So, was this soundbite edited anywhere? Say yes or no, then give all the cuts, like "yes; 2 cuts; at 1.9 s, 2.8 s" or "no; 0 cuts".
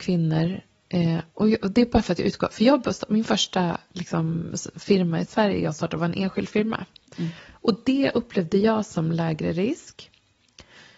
yes; 1 cut; at 1.3 s